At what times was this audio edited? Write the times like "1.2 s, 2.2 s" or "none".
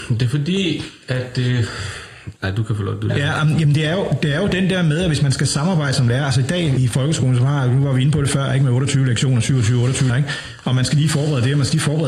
2.4 s, 3.1 s, 6.8 s, 10.1 s